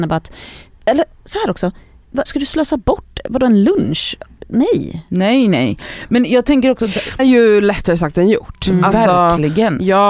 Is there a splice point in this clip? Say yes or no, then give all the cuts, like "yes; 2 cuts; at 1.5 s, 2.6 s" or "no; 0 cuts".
yes; 2 cuts; at 2.3 s, 7.2 s